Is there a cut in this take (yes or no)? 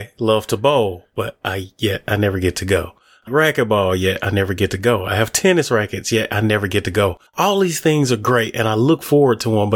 yes